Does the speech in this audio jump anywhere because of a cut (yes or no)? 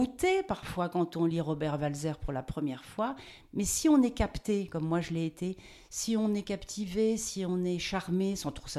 no